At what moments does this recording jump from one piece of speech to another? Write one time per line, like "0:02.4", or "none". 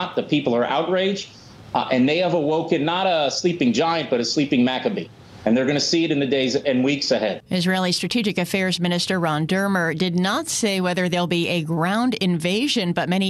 0:07.5